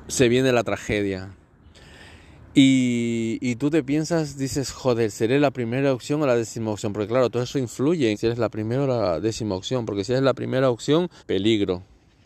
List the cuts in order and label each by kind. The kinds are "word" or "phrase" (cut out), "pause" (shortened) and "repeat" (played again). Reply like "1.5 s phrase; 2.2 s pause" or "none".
8.1 s word; 11.2 s pause